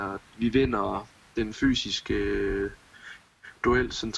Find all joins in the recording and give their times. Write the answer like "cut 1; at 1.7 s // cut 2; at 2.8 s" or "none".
none